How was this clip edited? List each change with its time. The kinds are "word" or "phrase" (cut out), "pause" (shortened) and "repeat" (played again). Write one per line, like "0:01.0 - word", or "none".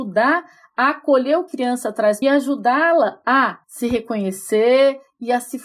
0:01.5 - word
0:02.2 - phrase
0:03.6 - pause